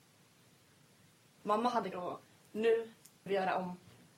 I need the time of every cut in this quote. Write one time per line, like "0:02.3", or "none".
0:01.9
0:03.3